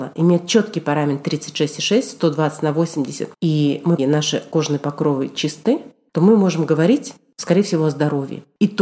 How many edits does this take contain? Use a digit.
2